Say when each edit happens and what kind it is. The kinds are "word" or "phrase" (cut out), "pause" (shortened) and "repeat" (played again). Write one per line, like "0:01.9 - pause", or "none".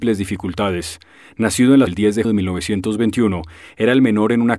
0:01.9 - phrase
0:02.2 - word

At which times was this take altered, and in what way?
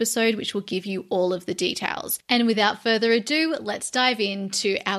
none

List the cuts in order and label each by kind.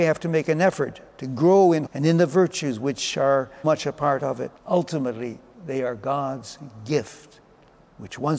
0:01.1 - pause
0:01.9 - word
0:03.6 - word
0:04.6 - pause

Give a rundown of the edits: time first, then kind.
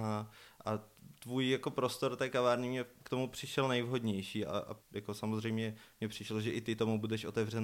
0:04.8 - pause

